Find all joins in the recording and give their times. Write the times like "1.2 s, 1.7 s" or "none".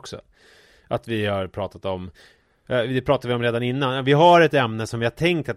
none